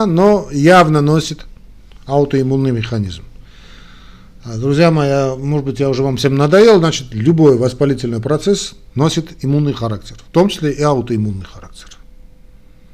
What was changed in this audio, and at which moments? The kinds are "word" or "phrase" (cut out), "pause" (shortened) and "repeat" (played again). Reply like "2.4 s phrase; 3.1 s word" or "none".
none